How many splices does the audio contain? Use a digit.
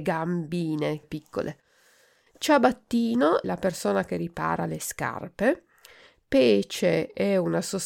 2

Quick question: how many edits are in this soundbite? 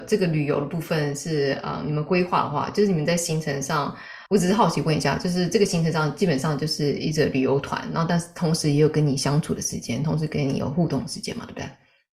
1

